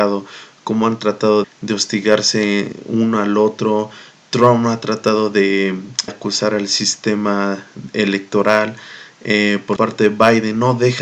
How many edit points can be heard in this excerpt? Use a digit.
4